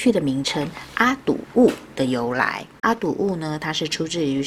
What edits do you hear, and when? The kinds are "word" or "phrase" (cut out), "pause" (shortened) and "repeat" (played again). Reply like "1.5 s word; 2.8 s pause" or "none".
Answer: 2.8 s pause